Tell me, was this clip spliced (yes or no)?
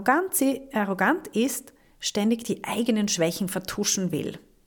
no